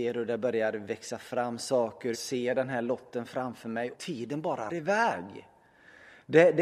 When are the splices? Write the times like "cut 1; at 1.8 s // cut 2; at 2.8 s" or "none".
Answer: cut 1; at 2.1 s // cut 2; at 3.9 s // cut 3; at 4.7 s